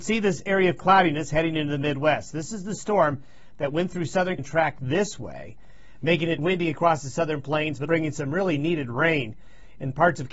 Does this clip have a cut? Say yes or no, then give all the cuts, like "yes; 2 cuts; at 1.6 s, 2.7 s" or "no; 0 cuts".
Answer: yes; 3 cuts; at 4.4 s, 6.4 s, 7.9 s